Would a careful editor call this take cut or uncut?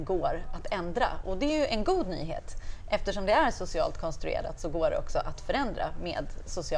uncut